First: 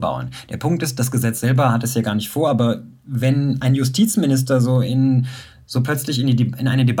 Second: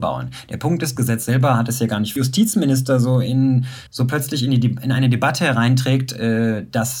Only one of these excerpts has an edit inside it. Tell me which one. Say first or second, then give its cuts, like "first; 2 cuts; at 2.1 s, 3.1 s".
second; 3 cuts; at 1.0 s, 2.2 s, 3.9 s